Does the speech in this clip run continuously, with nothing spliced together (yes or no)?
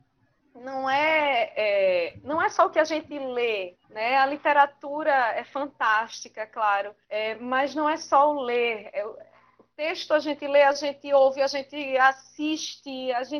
no